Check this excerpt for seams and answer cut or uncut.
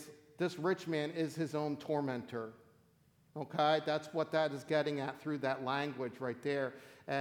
uncut